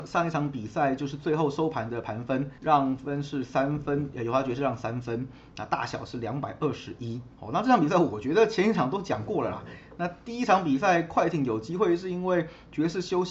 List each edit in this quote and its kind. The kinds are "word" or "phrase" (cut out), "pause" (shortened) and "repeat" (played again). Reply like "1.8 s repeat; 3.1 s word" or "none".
2.6 s pause; 7.3 s pause